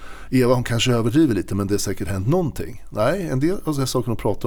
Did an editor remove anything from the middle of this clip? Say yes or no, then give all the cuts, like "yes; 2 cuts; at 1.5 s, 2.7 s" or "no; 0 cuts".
no; 0 cuts